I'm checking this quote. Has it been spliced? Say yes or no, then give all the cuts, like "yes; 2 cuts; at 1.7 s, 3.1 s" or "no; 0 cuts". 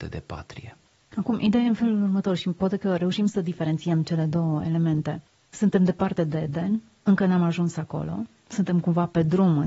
no; 0 cuts